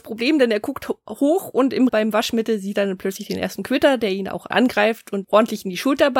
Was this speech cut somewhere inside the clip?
yes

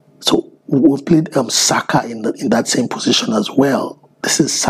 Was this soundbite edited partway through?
no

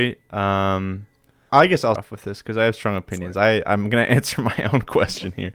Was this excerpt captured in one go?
no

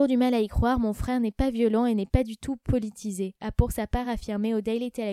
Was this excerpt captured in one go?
yes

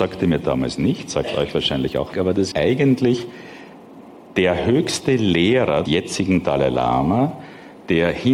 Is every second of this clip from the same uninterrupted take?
no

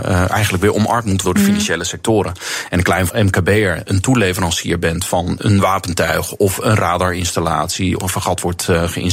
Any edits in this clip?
yes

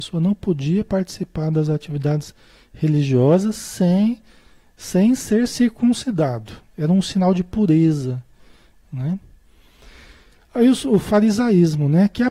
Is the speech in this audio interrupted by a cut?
no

